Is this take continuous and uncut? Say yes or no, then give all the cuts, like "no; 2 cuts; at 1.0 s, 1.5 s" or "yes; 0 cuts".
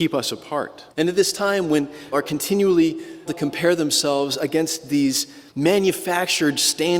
no; 4 cuts; at 0.9 s, 2.1 s, 3.3 s, 5.5 s